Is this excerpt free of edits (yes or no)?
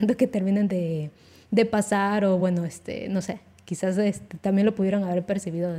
yes